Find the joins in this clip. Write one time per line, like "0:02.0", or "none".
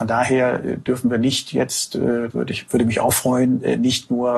0:02.3